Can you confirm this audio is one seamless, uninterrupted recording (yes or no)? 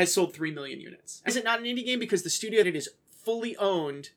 no